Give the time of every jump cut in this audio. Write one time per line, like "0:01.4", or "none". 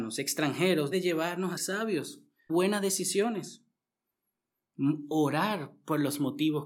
0:00.9
0:01.6
0:02.5